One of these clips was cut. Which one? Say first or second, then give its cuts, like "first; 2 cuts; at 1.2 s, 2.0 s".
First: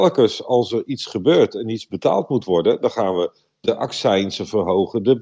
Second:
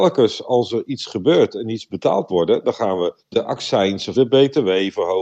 second; 3 cuts; at 2.3 s, 3.2 s, 4.1 s